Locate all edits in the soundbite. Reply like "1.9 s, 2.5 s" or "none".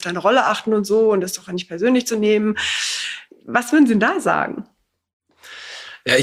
none